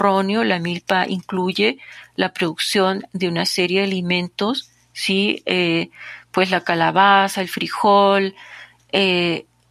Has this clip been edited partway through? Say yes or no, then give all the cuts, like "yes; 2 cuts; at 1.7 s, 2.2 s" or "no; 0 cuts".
no; 0 cuts